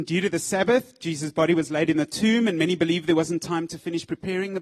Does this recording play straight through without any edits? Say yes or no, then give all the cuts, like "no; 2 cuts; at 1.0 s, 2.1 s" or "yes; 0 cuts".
yes; 0 cuts